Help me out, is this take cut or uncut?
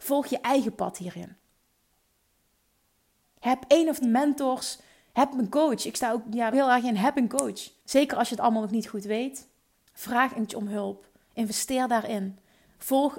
cut